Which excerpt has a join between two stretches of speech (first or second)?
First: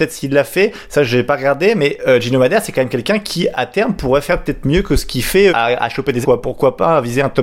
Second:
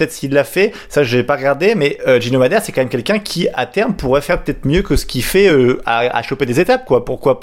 first